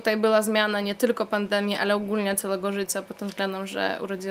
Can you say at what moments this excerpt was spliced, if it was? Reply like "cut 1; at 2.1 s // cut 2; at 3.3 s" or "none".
none